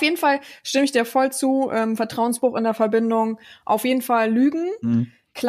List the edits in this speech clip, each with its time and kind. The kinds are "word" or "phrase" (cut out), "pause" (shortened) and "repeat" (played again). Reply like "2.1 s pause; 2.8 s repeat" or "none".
none